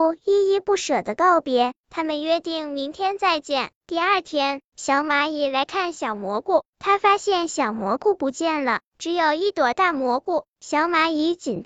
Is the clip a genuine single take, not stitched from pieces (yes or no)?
no